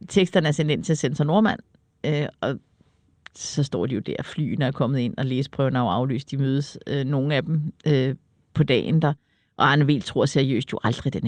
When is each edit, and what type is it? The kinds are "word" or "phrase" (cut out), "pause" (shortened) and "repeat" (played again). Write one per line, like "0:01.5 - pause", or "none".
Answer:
none